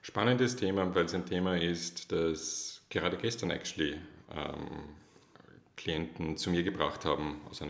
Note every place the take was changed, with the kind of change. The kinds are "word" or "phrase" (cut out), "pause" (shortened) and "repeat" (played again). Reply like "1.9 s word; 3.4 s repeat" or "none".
none